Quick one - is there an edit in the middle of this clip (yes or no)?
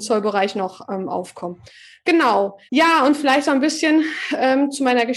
yes